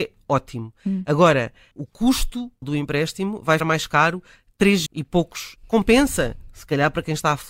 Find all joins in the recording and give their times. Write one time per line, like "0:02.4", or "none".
0:01.7
0:02.6
0:03.6
0:04.9
0:05.6